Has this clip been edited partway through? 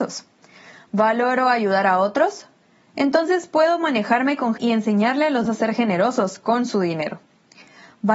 yes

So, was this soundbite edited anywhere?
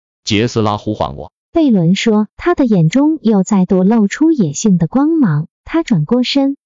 yes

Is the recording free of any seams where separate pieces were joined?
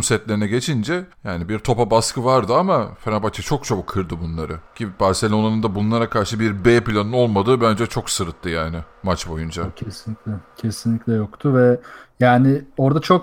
no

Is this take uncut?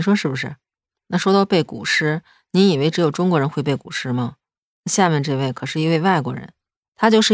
yes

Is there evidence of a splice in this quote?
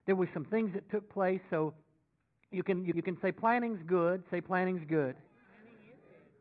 yes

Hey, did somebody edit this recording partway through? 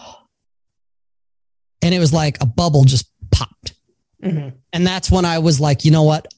no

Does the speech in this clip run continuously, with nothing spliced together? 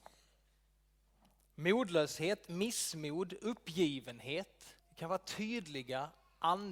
no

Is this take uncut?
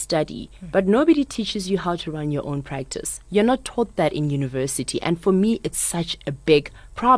yes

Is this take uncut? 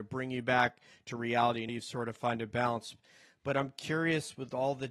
no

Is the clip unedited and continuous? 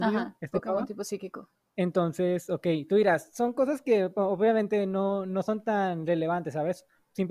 no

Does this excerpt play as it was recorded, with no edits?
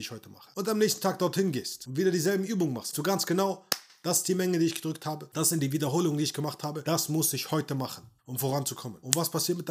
no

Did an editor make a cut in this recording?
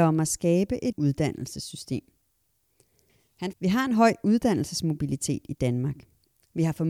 yes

